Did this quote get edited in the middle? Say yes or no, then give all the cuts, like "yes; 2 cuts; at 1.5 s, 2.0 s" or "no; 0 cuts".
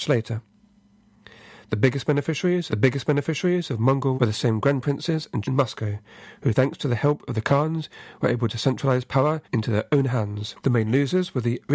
yes; 5 cuts; at 2.7 s, 4.1 s, 5.4 s, 9.4 s, 10.6 s